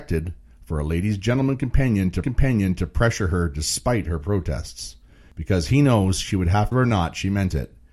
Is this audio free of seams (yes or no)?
no